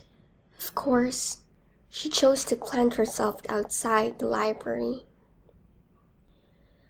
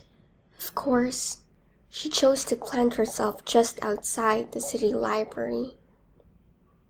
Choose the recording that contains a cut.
first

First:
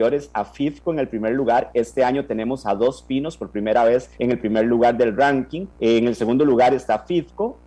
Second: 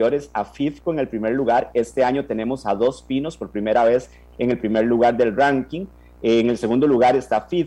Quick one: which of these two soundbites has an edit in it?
first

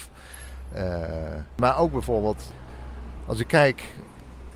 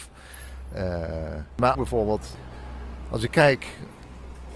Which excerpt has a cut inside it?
second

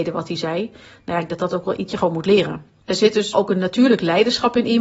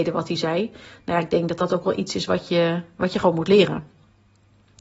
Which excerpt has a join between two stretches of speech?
first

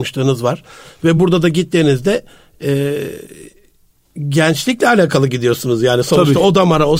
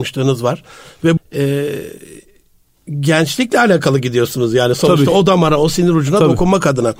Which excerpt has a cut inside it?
second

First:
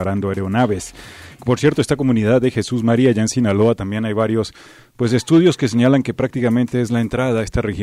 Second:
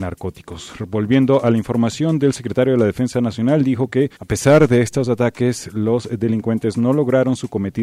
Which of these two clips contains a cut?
second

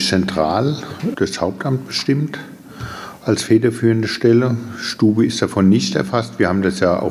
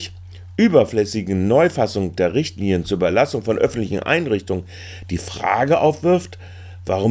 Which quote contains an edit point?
first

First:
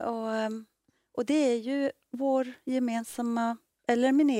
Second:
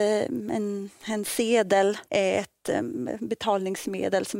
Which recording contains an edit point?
second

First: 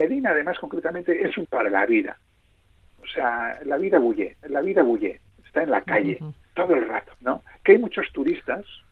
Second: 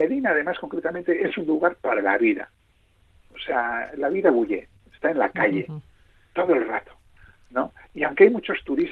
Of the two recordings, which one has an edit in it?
first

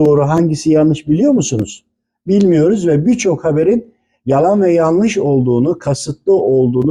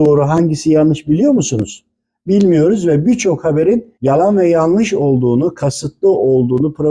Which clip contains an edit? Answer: second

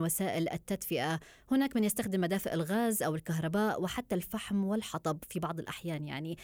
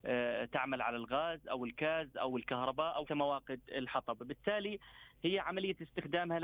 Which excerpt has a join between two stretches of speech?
second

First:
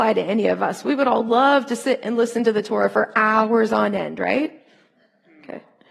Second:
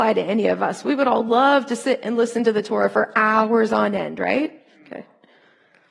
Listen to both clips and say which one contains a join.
second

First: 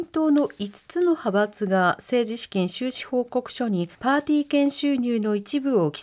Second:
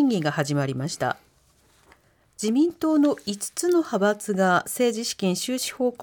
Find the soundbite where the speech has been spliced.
first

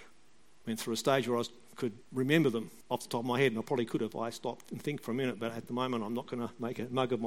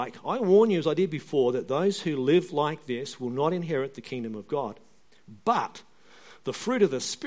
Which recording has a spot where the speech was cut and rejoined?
first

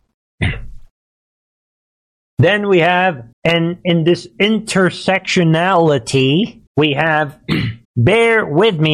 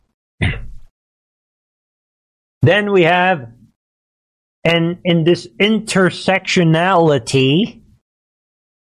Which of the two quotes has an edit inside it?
first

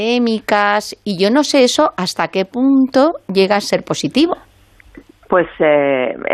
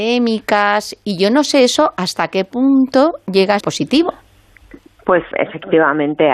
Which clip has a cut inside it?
second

